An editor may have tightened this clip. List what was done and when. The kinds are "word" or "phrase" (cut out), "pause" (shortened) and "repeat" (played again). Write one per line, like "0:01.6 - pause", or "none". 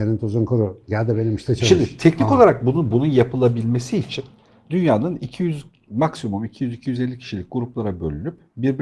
none